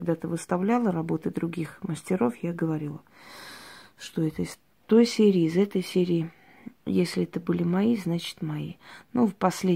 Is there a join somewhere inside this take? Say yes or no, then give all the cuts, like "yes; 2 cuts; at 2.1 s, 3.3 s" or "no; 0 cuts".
yes; 1 cut; at 6.8 s